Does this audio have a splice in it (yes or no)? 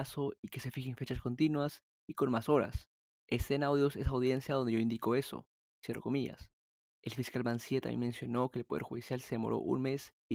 no